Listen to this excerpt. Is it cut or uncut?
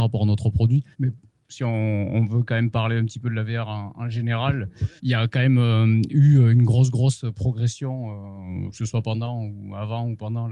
cut